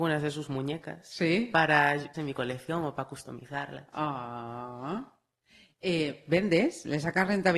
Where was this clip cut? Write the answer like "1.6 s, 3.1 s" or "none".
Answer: 2.1 s